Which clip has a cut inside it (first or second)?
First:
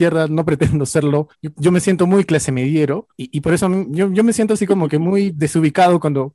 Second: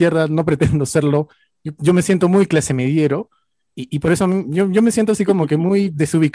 first